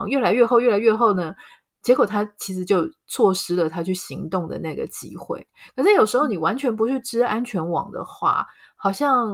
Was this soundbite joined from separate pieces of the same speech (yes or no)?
no